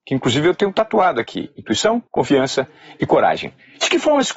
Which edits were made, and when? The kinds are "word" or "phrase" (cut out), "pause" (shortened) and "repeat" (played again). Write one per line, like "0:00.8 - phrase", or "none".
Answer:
0:02.1 - pause